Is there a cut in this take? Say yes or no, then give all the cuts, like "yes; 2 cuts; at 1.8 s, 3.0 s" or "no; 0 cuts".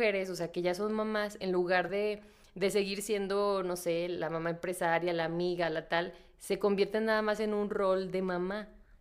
no; 0 cuts